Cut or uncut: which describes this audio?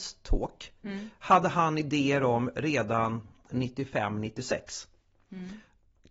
uncut